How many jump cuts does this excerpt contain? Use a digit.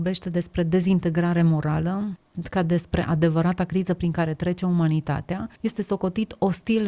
1